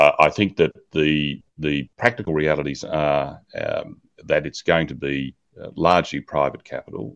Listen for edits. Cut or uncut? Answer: cut